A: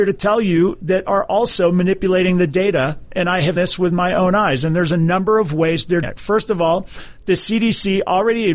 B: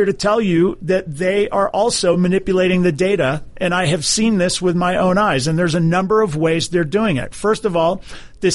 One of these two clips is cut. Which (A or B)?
A